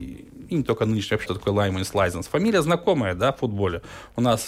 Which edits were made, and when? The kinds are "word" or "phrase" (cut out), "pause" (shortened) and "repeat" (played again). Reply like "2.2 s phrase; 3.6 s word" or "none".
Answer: 1.3 s phrase